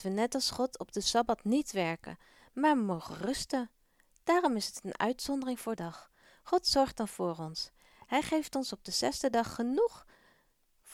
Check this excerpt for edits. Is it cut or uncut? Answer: cut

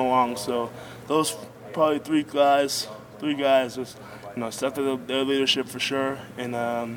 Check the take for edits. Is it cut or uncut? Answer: uncut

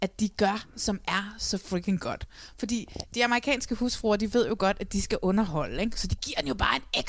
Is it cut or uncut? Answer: uncut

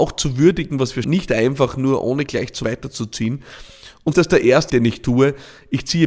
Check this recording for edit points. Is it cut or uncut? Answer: cut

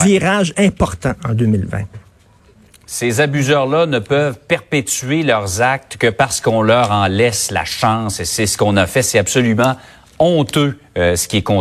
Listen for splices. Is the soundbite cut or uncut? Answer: uncut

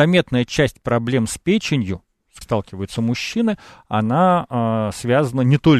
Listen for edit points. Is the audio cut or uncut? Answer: cut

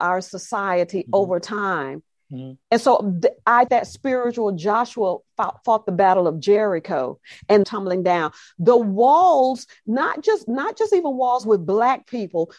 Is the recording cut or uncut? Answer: cut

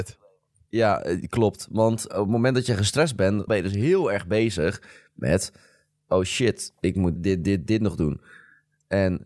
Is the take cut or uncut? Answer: cut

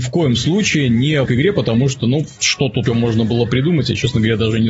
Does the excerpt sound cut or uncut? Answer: cut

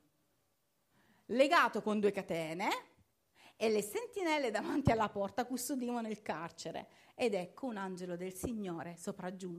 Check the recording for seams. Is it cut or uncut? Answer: uncut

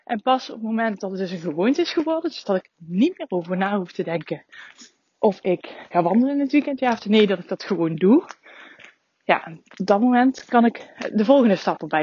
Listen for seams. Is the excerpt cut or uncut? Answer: cut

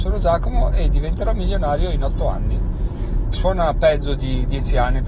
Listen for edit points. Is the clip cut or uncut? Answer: cut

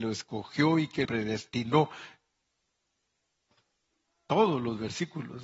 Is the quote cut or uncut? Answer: cut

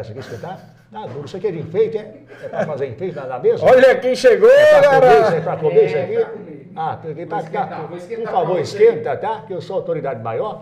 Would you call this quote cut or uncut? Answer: uncut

